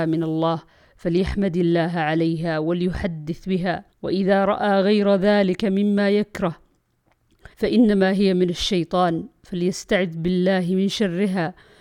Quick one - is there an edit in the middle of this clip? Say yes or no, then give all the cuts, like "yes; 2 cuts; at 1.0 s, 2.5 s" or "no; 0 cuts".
yes; 2 cuts; at 3.9 s, 7.5 s